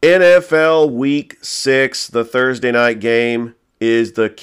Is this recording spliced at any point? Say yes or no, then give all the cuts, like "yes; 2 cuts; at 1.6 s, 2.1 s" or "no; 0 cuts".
no; 0 cuts